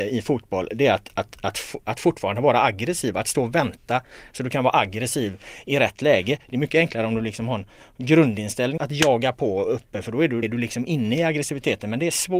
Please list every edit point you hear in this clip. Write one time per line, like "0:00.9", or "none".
0:08.8
0:10.4